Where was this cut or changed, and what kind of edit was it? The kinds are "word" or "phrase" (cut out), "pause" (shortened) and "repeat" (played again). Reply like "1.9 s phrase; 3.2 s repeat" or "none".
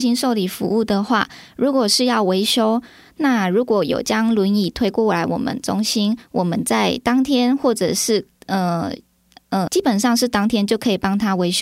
8.3 s pause; 9.7 s word

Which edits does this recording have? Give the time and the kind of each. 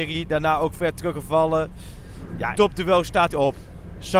2.5 s word; 3.3 s phrase

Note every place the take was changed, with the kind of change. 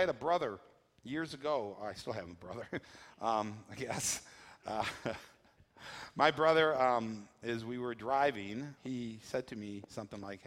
8.8 s word

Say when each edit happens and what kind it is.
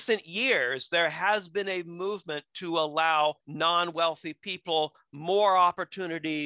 3.4 s pause

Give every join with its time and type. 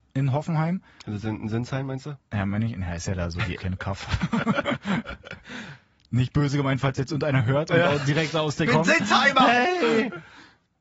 2.3 s pause; 3.6 s word; 8.7 s word

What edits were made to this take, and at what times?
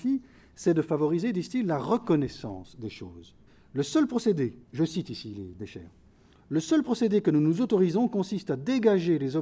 3.5 s pause; 4.6 s pause

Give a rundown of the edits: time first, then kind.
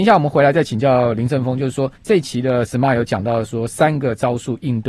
2.0 s pause

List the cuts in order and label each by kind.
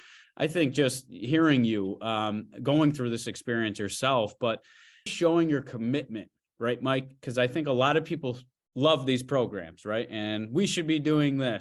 5.1 s word

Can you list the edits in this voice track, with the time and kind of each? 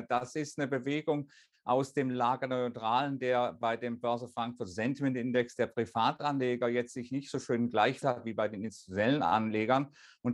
8.0 s word

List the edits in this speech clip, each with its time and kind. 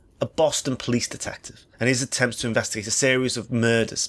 1.7 s pause

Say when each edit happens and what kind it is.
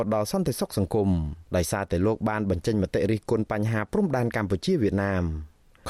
1.5 s pause

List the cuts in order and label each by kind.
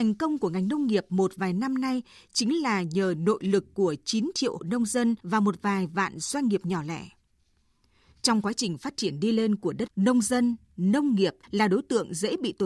4.6 s word; 5.2 s pause; 9.9 s word; 11.4 s pause

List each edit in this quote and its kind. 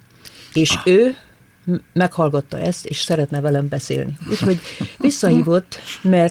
none

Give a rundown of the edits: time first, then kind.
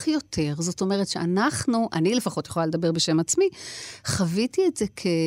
none

